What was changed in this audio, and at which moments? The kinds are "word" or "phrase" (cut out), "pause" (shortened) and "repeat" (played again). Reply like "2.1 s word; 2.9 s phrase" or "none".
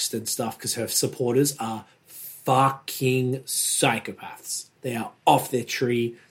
4.8 s pause